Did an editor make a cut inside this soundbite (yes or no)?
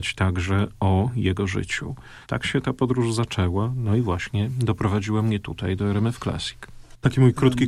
yes